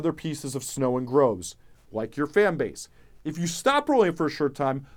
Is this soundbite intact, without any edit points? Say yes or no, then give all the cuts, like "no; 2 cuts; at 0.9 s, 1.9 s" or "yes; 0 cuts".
yes; 0 cuts